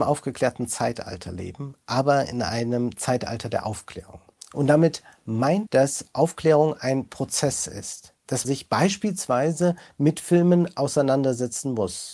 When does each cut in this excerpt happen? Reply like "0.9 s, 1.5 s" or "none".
5.7 s, 8.4 s